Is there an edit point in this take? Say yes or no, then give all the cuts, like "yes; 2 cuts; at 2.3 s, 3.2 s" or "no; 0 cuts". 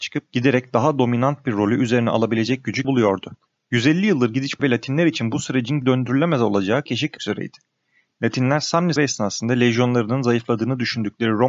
yes; 6 cuts; at 2.8 s, 4.6 s, 5.8 s, 6.9 s, 7.2 s, 9.0 s